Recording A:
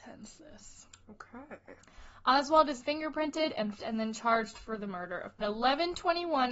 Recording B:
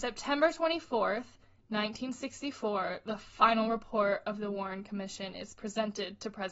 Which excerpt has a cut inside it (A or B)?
A